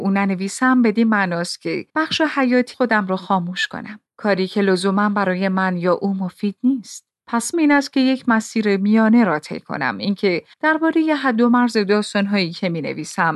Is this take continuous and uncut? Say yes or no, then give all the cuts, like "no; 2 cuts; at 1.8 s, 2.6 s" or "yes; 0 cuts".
no; 5 cuts; at 1.9 s, 2.7 s, 4.1 s, 7.5 s, 10.5 s